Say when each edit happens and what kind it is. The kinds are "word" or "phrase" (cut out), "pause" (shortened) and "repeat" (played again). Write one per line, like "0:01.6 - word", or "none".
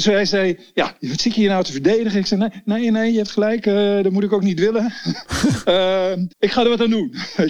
0:06.3 - word